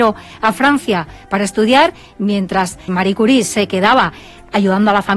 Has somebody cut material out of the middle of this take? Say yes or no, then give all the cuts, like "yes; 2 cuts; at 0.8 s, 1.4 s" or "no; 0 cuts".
yes; 1 cut; at 2.9 s